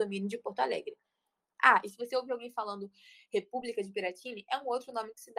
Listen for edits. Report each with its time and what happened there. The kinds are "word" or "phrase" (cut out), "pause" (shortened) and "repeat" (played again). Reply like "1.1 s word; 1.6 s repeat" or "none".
none